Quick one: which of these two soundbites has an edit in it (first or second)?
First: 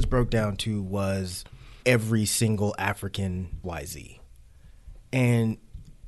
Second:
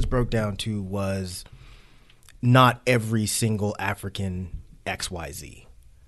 first